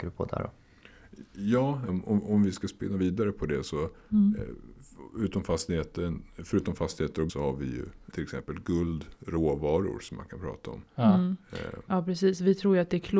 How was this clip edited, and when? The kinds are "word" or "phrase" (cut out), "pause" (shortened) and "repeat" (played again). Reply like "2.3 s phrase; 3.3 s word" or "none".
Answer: 1.9 s word; 7.3 s word; 8.1 s word; 10.9 s pause